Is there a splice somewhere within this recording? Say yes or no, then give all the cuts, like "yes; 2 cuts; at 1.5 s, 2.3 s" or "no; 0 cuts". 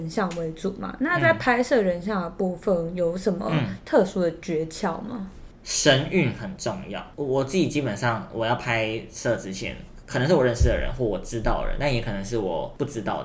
no; 0 cuts